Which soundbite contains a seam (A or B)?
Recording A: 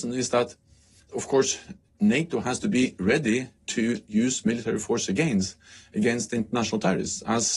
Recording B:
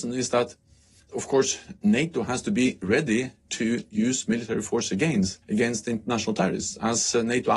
B